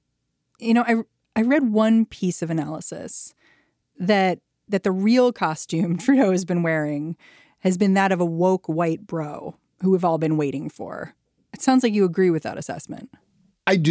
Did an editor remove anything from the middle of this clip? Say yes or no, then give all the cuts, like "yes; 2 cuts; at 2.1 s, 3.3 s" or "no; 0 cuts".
yes; 1 cut; at 4.7 s